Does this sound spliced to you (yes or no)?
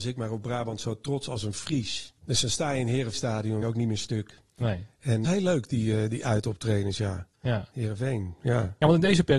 yes